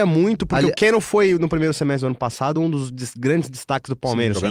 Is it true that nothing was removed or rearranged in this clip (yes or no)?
yes